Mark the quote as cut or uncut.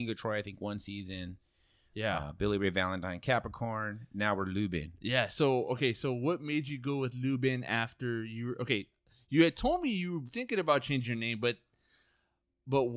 cut